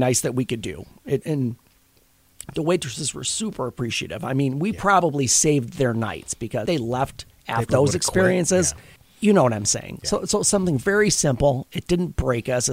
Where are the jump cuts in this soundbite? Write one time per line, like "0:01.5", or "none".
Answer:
0:01.2
0:06.7
0:07.7
0:09.0